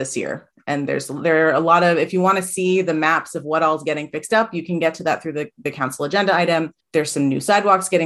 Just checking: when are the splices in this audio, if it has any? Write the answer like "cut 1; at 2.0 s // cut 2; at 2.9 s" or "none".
cut 1; at 6.8 s